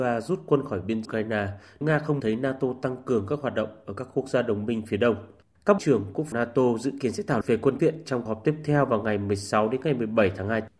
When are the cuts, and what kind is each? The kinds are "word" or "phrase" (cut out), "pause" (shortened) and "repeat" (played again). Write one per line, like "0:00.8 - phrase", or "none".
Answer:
0:01.0 - word
0:01.8 - word
0:02.2 - word
0:05.8 - word
0:06.3 - word
0:07.4 - word
0:07.8 - word
0:08.3 - word